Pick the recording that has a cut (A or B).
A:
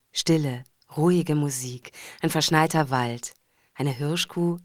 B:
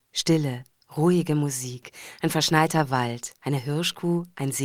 B